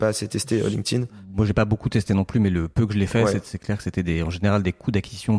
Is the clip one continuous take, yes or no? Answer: yes